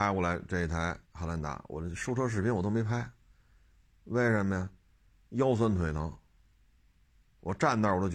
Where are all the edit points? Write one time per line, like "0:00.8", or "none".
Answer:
0:01.0